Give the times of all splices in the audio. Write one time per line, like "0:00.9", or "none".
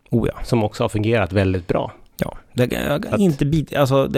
none